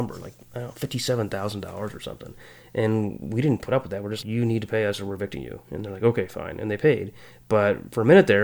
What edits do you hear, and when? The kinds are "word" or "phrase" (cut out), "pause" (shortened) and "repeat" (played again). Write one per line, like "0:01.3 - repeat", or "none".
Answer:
0:04.2 - word